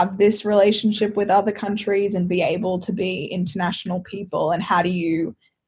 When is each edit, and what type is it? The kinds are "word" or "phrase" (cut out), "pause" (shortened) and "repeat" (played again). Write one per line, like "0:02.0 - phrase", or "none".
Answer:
none